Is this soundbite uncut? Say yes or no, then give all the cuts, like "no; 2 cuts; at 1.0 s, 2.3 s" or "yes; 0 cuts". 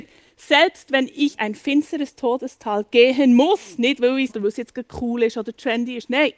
no; 2 cuts; at 1.4 s, 4.3 s